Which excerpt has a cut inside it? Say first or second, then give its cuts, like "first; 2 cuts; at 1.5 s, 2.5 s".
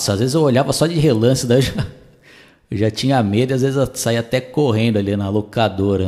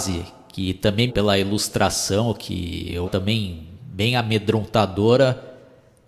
second; 2 cuts; at 1.1 s, 3.0 s